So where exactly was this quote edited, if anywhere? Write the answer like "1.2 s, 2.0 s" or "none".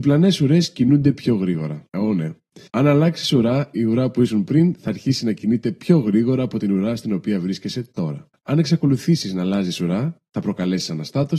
1.9 s, 2.7 s, 8.3 s